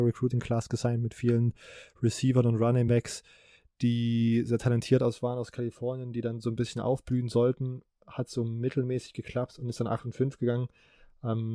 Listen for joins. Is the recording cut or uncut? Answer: uncut